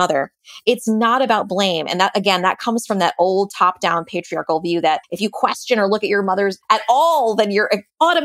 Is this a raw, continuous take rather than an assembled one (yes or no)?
no